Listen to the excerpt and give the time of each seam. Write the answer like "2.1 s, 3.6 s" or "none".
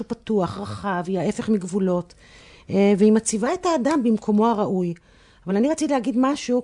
none